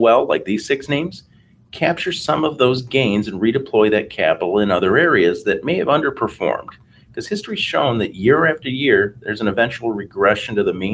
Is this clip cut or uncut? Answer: uncut